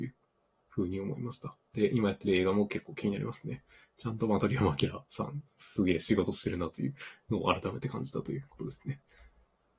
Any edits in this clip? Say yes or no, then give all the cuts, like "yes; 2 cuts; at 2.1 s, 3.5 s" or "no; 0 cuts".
no; 0 cuts